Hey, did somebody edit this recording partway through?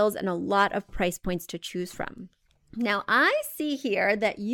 no; 0 cuts

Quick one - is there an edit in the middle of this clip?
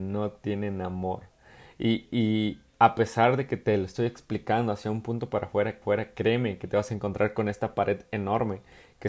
yes; 2 cuts; at 2.7 s, 5.8 s

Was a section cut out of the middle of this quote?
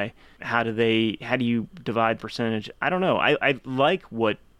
yes; 1 cut; at 2.2 s

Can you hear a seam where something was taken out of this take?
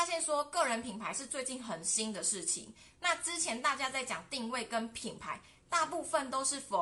no; 0 cuts

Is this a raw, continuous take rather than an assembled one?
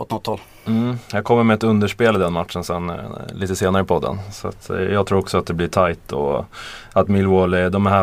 yes; 0 cuts

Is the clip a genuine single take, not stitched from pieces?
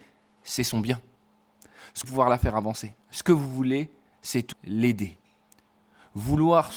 no; 3 cuts; at 2.0 s, 3.0 s, 4.5 s

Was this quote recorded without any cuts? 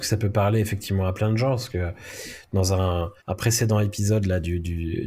no; 1 cut; at 3.2 s

